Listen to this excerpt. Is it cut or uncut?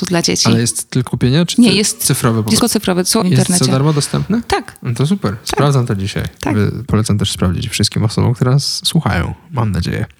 cut